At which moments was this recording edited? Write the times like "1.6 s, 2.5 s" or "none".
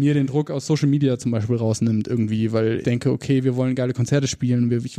2.8 s